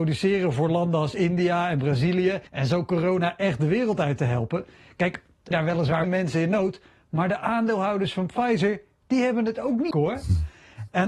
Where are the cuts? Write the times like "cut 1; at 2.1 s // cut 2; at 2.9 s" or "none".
cut 1; at 2.5 s // cut 2; at 5.5 s // cut 3; at 6.0 s // cut 4; at 9.9 s